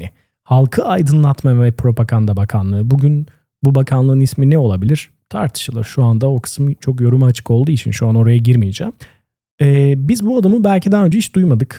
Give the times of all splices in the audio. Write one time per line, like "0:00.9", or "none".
none